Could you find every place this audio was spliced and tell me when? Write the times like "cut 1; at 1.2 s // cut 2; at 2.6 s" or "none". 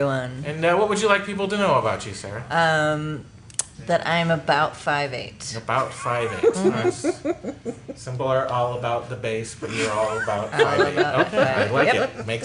cut 1; at 8.2 s